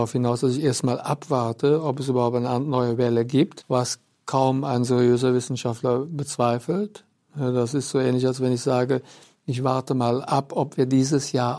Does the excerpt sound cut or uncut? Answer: uncut